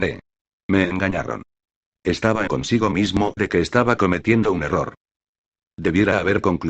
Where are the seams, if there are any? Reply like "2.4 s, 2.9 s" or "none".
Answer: 2.5 s, 3.4 s